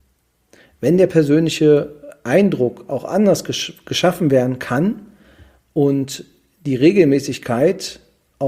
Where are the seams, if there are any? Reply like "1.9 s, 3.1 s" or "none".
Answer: none